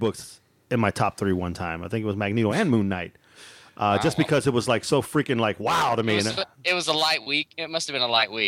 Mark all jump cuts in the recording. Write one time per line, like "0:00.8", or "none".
none